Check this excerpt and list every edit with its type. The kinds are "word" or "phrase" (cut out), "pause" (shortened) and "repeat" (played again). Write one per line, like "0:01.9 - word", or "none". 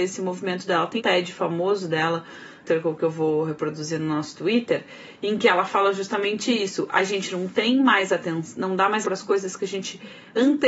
0:01.0 - word
0:02.6 - phrase
0:09.0 - word